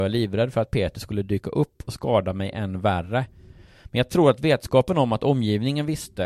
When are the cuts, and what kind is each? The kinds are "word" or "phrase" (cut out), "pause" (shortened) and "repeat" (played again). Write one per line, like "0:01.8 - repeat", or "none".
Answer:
none